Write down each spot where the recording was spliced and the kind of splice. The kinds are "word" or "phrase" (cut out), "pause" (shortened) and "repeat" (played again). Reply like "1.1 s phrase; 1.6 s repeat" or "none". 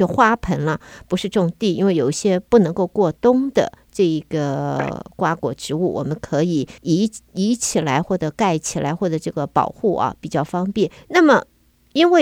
6.8 s pause; 11.0 s pause